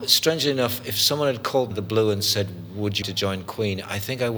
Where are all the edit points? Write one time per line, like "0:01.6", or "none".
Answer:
0:01.7
0:03.0